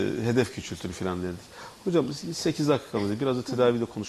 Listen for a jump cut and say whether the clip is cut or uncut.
uncut